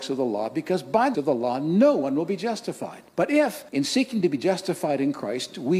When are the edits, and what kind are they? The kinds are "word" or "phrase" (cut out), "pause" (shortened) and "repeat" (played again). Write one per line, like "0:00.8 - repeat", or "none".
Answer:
0:01.1 - word
0:03.1 - pause
0:03.7 - pause